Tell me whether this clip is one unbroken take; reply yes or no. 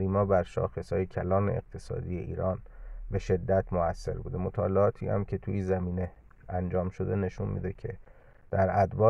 yes